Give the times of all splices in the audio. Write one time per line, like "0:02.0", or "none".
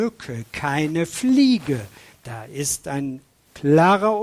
none